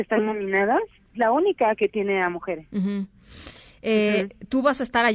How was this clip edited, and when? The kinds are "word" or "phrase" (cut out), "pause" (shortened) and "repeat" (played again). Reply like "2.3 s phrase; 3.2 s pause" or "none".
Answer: 1.1 s word